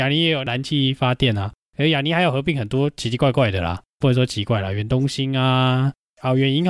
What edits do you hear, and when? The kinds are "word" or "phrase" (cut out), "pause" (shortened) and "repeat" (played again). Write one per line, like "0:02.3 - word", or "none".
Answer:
none